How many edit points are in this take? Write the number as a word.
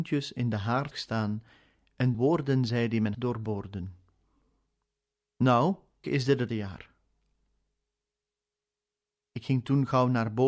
five